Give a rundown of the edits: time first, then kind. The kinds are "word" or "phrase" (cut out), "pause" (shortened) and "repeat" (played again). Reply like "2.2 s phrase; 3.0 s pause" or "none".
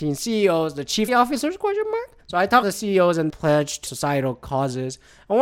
1.1 s word; 2.2 s pause; 2.6 s word; 3.3 s word; 3.9 s word